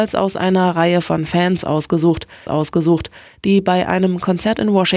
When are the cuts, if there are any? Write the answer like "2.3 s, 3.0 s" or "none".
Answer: 2.5 s